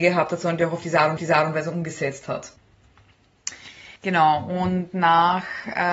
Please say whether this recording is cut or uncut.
cut